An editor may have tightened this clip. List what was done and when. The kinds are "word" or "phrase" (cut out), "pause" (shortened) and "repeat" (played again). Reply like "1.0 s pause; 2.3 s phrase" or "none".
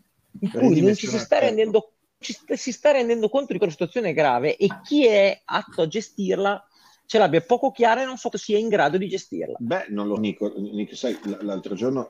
2.2 s word; 3.6 s word; 8.3 s word; 10.2 s word